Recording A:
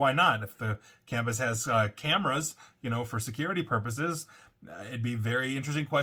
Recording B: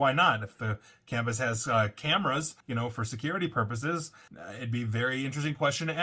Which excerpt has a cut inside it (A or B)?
B